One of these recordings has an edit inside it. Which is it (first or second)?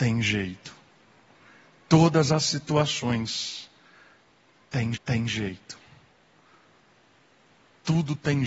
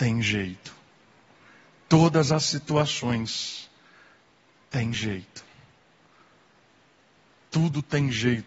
first